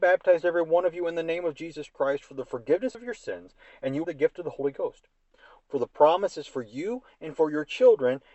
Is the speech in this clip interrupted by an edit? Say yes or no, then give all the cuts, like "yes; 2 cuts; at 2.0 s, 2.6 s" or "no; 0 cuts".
yes; 1 cut; at 4.0 s